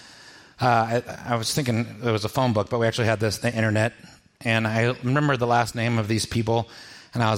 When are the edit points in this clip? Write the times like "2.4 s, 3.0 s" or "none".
none